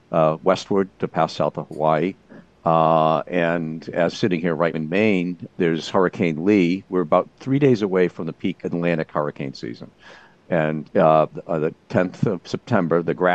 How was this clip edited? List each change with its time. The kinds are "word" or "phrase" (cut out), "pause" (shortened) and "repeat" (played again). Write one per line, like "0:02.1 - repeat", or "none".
0:00.9 - word
0:04.1 - word
0:04.7 - word
0:05.5 - word
0:08.6 - word
0:10.8 - word